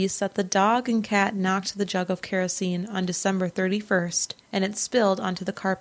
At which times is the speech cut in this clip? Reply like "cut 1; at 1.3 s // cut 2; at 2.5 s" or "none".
cut 1; at 4.4 s